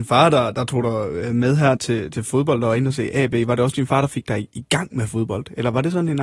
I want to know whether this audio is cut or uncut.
cut